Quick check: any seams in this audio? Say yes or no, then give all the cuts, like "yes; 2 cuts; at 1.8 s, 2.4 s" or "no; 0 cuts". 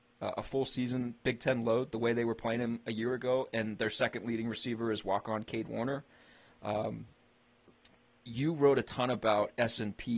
no; 0 cuts